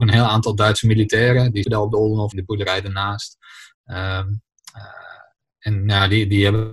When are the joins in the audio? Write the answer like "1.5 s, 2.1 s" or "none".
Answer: 1.6 s, 2.3 s, 5.4 s